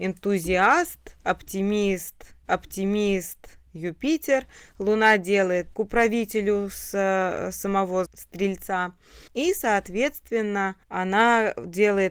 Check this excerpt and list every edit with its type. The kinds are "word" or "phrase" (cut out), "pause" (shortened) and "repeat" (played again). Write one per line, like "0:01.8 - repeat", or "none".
0:02.5 - repeat
0:05.7 - phrase
0:08.1 - word
0:09.3 - pause
0:10.8 - pause